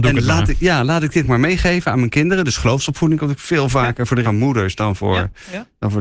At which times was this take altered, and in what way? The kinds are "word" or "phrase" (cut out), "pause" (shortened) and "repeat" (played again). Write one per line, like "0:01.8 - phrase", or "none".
0:01.2 - word
0:04.2 - word